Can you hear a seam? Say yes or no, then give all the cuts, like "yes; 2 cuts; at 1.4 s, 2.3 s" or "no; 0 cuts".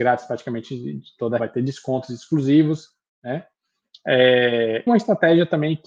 yes; 2 cuts; at 1.4 s, 4.9 s